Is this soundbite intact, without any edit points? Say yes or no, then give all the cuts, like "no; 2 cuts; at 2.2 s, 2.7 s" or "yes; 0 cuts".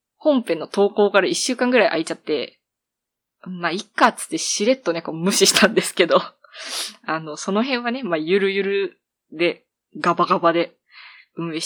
yes; 0 cuts